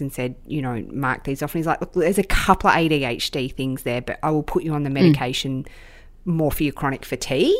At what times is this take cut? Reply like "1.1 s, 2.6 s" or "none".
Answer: none